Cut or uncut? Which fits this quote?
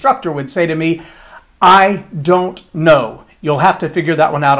uncut